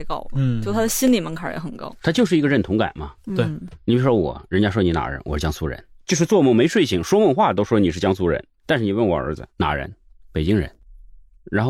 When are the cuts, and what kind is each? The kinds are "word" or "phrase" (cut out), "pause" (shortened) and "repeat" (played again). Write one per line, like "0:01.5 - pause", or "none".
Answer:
0:06.0 - word
0:09.5 - pause